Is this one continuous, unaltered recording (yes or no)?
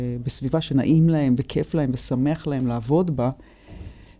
yes